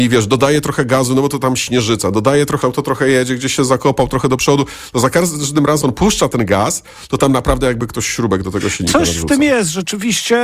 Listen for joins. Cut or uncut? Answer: cut